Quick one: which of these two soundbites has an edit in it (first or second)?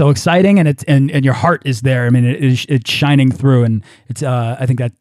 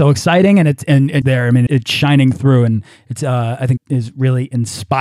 second